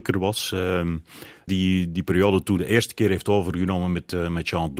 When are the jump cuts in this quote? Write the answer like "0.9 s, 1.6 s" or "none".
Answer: 1.5 s, 2.6 s